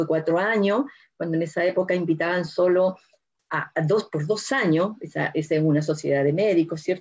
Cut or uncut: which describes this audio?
uncut